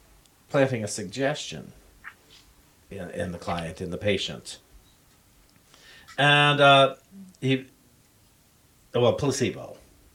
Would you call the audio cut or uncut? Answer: uncut